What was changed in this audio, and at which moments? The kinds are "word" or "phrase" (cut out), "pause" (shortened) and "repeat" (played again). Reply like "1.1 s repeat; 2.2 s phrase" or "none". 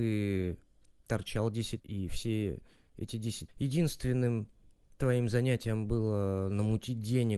1.8 s word; 3.5 s phrase